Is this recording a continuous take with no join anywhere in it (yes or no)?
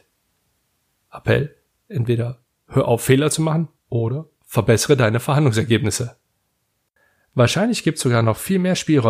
no